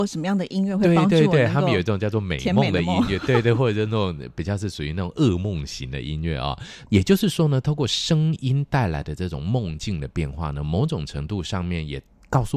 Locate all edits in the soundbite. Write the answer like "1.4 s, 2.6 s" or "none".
none